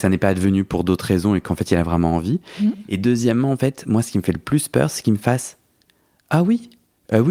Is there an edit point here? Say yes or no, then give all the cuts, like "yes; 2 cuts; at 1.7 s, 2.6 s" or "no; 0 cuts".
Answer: no; 0 cuts